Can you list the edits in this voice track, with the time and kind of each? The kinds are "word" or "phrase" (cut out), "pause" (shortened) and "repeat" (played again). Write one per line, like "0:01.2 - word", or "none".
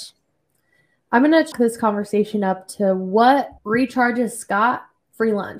0:01.5 - word
0:03.6 - pause